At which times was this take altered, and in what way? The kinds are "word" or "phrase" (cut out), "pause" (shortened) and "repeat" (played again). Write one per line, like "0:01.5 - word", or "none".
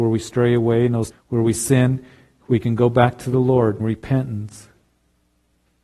0:01.1 - word
0:03.8 - word